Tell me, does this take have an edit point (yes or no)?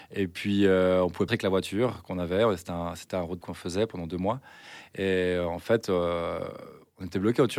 yes